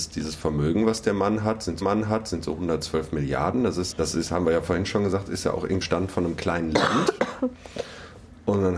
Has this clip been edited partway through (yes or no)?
yes